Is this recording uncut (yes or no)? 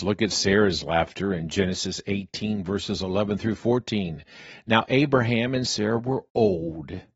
yes